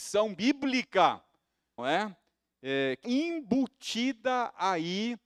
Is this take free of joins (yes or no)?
no